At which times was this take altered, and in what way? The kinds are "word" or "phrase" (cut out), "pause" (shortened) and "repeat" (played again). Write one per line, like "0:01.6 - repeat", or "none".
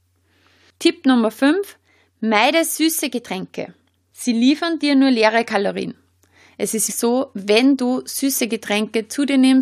0:06.9 - word